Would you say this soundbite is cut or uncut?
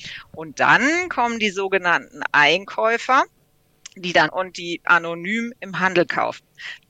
cut